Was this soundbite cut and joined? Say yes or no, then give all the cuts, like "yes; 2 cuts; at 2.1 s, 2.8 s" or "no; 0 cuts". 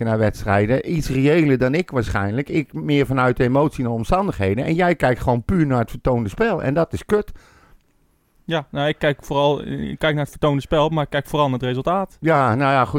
no; 0 cuts